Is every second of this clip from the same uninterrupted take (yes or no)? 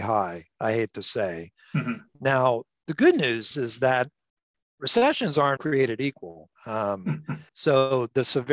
no